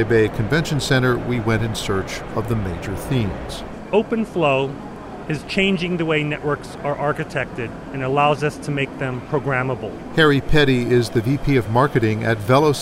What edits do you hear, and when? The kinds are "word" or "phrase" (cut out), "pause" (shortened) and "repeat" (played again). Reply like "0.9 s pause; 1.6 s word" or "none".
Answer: none